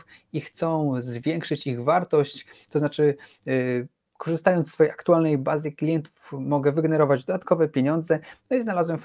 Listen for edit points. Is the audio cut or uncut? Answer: uncut